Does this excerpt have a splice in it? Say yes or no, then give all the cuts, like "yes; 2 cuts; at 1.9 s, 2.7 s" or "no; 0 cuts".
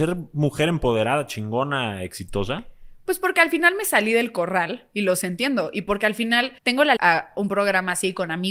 yes; 2 cuts; at 6.6 s, 7.0 s